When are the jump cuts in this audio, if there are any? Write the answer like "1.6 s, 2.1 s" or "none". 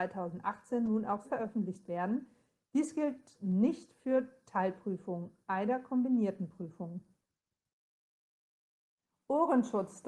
1.2 s